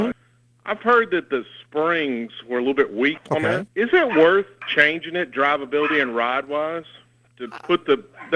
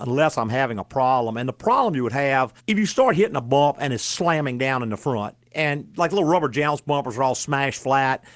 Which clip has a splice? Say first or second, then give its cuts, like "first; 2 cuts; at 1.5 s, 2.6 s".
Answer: second; 1 cut; at 2.6 s